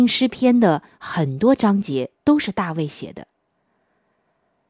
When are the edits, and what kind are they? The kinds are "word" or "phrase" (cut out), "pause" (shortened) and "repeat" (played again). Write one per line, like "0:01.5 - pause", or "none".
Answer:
0:02.1 - pause